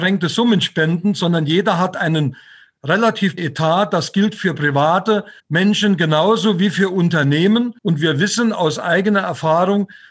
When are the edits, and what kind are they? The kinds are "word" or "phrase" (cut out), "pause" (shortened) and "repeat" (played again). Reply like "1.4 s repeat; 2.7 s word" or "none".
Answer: 3.4 s word; 5.4 s pause; 7.8 s pause